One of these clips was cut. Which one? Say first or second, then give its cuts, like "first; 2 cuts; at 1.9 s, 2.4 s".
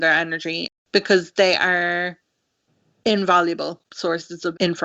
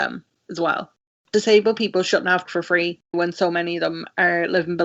second; 2 cuts; at 2.5 s, 3.1 s